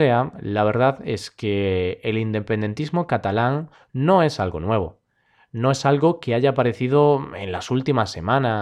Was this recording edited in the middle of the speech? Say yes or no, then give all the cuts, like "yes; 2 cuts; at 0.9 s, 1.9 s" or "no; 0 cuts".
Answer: no; 0 cuts